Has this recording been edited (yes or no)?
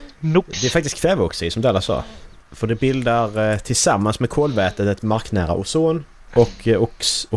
no